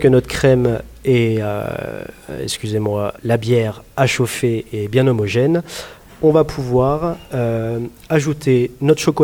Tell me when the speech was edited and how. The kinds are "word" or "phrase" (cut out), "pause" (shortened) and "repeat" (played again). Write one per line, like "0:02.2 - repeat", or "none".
0:03.2 - pause